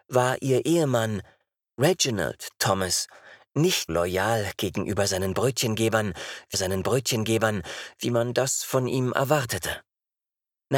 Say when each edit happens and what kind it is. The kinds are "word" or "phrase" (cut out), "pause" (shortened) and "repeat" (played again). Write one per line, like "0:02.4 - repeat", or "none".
0:03.9 - word
0:06.5 - repeat